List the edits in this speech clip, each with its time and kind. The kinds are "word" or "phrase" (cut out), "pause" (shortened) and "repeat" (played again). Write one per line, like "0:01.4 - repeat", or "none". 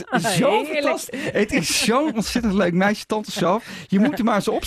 none